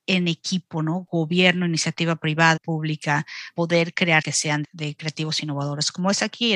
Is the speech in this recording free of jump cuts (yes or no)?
no